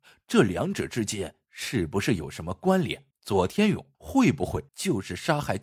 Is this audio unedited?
no; 3 cuts; at 3.1 s, 3.9 s, 4.7 s

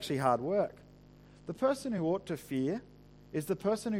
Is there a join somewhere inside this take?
no; 0 cuts

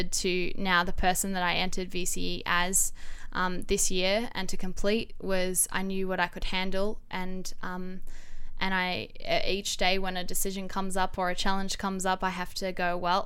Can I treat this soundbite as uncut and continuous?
yes; 0 cuts

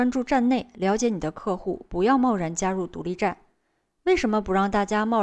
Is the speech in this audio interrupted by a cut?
no; 0 cuts

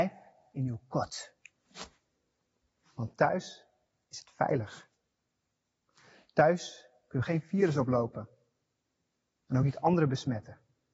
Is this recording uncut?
yes; 0 cuts

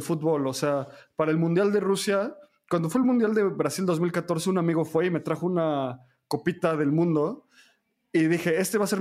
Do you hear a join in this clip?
no; 0 cuts

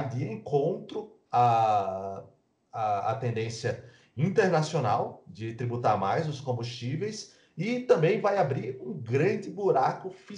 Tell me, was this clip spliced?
no; 0 cuts

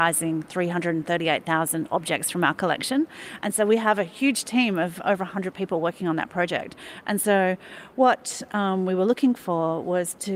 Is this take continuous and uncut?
yes; 0 cuts

